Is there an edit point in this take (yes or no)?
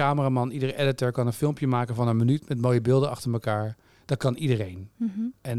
no